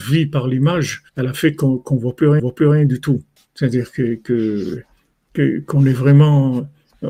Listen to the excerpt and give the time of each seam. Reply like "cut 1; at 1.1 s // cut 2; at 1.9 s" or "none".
cut 1; at 1.1 s // cut 2; at 2.4 s // cut 3; at 3.4 s